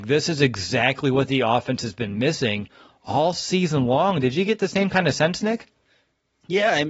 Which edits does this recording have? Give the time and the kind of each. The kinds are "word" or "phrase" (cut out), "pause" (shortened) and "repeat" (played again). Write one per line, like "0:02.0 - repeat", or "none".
none